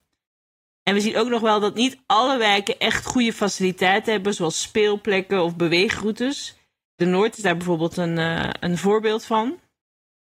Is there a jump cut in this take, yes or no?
no